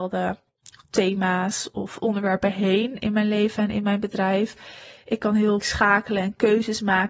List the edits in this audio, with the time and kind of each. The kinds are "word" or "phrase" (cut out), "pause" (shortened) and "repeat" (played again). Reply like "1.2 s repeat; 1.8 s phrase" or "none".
5.6 s word